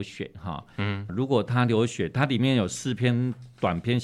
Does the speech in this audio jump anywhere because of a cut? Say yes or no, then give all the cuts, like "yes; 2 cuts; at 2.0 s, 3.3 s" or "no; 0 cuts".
yes; 1 cut; at 1.1 s